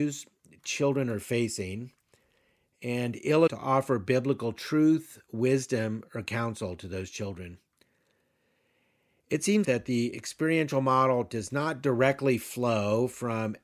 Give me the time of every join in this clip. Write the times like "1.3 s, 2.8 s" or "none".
3.5 s, 9.6 s